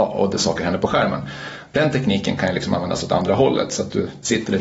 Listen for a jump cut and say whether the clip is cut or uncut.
uncut